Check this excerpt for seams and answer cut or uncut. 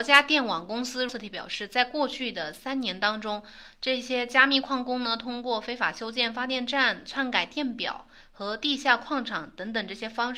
cut